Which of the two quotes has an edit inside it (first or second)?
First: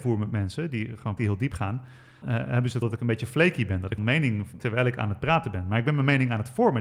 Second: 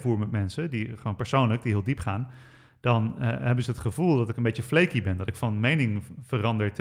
first